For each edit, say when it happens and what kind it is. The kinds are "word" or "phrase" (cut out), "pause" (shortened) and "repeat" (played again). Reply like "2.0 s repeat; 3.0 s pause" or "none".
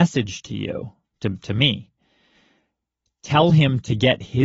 none